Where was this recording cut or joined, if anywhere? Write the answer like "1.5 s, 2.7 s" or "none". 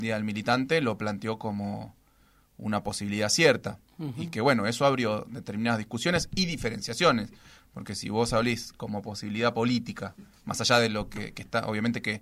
none